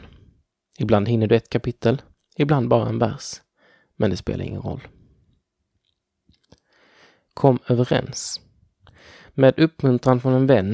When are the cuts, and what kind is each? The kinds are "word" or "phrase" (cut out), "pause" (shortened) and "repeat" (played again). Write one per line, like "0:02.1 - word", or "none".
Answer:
none